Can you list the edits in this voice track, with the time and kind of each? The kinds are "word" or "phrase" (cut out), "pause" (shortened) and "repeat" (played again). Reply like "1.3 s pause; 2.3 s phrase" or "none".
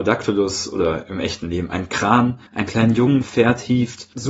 2.5 s pause; 3.2 s word